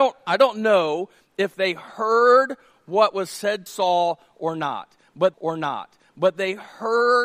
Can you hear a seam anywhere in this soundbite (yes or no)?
yes